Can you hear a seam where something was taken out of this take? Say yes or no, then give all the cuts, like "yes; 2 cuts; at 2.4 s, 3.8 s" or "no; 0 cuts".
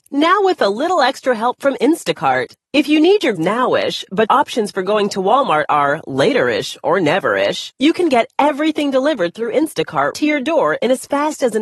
yes; 4 cuts; at 3.4 s, 4.3 s, 7.8 s, 10.1 s